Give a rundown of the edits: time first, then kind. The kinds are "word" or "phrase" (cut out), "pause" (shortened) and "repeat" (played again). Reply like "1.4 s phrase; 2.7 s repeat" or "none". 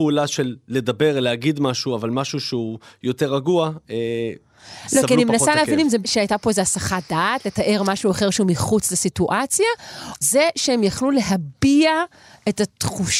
6.0 s word; 10.2 s word